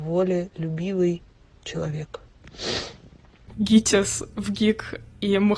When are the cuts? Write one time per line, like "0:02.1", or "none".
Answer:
none